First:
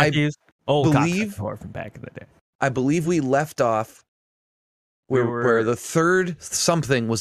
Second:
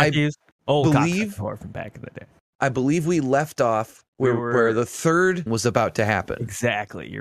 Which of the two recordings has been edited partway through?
second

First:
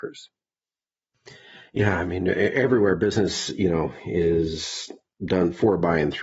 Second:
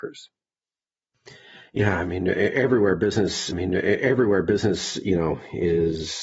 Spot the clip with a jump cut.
second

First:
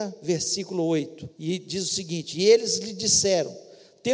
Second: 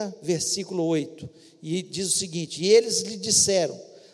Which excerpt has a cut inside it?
first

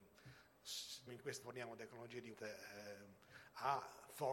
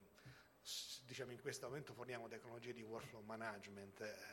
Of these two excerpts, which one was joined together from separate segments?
first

